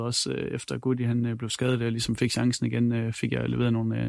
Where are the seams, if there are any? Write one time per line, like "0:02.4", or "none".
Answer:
none

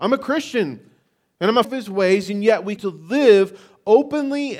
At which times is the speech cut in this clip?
0:01.6
0:02.8

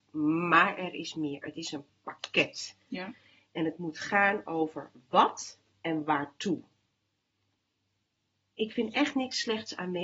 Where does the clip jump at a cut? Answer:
none

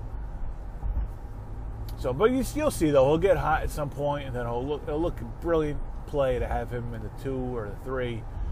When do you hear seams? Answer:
0:05.1

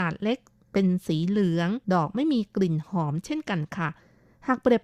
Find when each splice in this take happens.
0:01.8

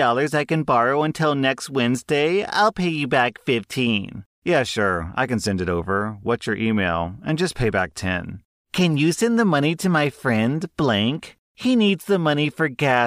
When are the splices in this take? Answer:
none

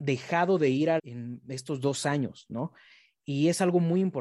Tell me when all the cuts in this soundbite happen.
0:01.0

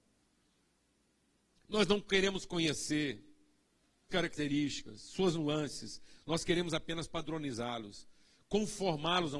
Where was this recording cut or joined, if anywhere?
0:04.1

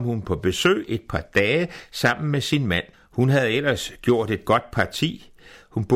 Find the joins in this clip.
0:02.9

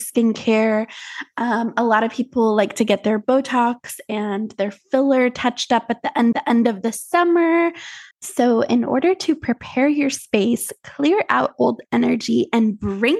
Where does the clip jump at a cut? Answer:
0:06.3
0:08.1

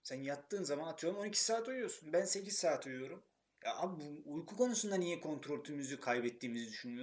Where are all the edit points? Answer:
none

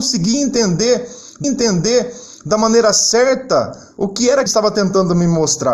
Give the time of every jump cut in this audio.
0:01.4
0:04.5

